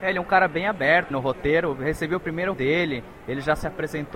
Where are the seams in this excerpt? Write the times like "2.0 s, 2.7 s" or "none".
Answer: 1.1 s, 2.5 s

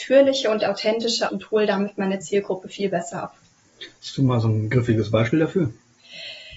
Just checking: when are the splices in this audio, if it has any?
1.3 s

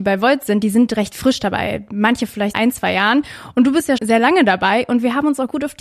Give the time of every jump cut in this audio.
2.5 s, 4.0 s

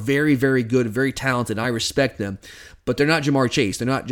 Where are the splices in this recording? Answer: none

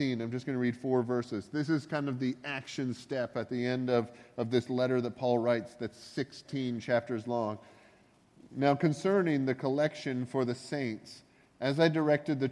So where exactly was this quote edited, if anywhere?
none

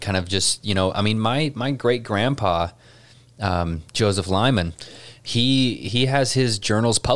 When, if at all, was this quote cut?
3.9 s

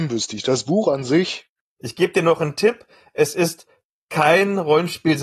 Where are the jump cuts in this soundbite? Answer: none

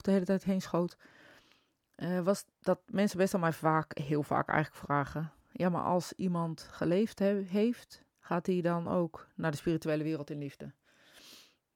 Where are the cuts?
2.5 s, 5.4 s, 8.1 s

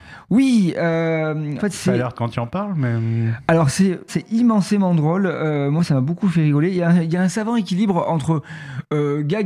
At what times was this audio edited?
1.6 s, 2.2 s, 4.1 s

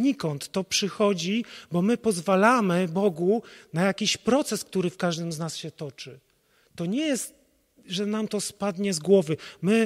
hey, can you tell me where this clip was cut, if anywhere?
none

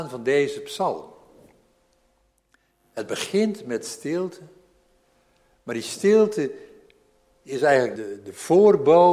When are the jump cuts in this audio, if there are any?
8.0 s

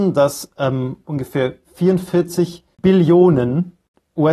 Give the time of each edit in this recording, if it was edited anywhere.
1.6 s

